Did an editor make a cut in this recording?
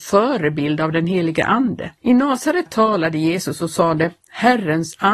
yes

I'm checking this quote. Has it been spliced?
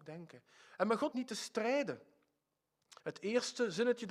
yes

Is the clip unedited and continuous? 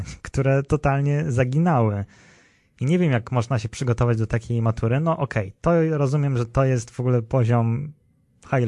yes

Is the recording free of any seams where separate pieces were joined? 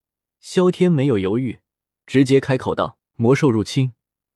no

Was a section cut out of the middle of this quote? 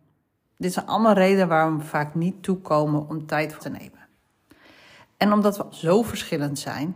yes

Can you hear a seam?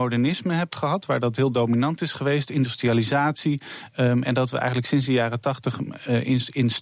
no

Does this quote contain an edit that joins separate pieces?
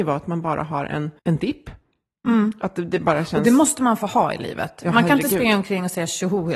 yes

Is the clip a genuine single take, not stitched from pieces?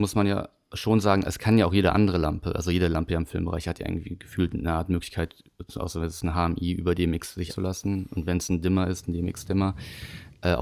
no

